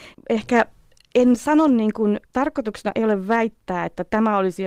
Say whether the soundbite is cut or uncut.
cut